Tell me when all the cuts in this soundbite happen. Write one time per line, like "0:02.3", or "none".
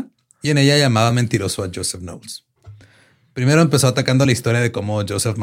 none